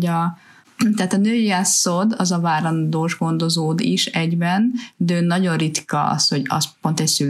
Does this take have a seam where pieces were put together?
no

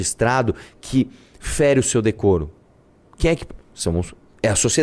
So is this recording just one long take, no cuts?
yes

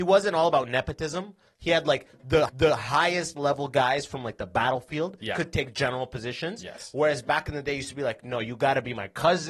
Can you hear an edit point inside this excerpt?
yes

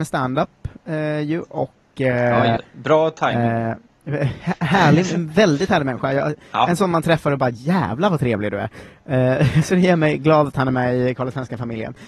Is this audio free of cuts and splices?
no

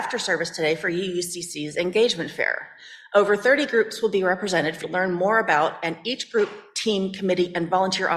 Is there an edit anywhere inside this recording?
yes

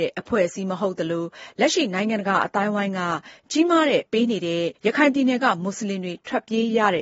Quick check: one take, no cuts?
no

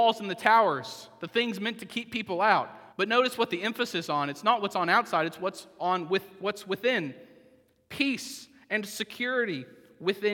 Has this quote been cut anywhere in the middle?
yes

